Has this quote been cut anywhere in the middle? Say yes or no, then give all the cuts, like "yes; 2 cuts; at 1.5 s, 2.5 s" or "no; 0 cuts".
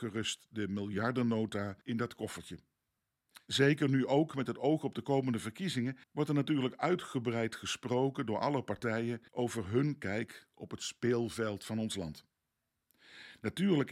yes; 3 cuts; at 1.8 s, 6.0 s, 9.3 s